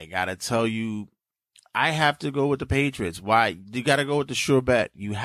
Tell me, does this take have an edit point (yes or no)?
no